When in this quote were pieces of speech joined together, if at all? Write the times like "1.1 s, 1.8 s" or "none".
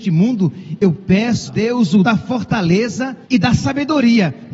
1.5 s, 2.0 s, 3.2 s